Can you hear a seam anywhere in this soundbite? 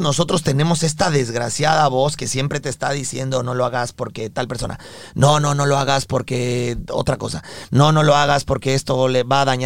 no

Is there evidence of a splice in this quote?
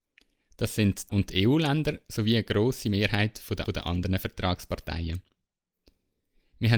yes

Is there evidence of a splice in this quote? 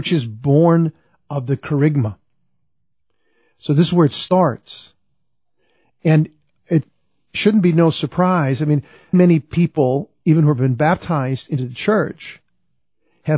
yes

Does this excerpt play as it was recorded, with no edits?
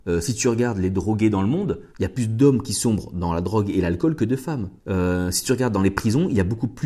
no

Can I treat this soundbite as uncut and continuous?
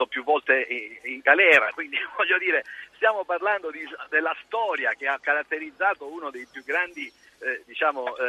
yes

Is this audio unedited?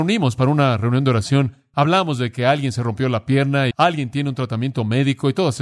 no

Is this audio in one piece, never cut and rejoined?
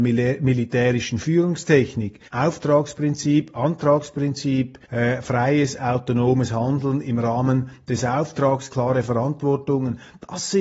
no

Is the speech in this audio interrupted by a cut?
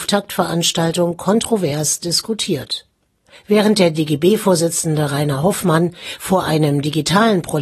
no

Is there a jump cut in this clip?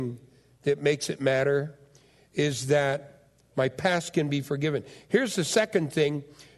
no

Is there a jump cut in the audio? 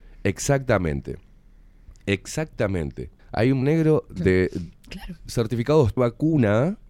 yes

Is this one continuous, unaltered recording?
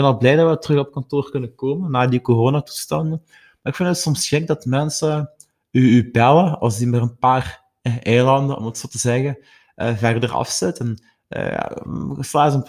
yes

